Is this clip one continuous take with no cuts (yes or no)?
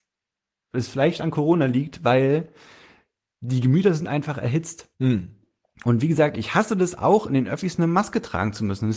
yes